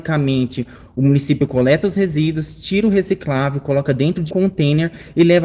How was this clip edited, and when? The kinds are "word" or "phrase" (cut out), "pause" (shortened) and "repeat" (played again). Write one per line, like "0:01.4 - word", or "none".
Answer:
0:04.3 - word